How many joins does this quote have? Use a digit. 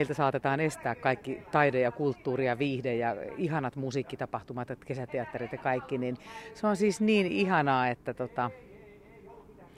0